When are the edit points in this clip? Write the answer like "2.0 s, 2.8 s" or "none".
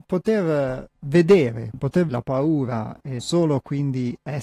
2.1 s, 3.2 s